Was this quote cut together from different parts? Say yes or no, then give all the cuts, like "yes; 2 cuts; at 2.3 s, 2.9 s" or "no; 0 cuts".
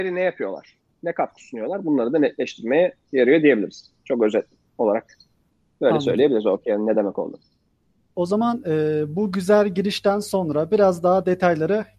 no; 0 cuts